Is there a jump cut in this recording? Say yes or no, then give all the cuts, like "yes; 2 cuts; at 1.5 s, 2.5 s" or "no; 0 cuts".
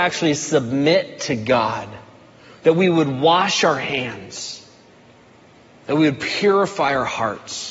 no; 0 cuts